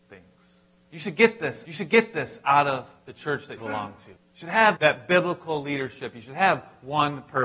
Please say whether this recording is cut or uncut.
cut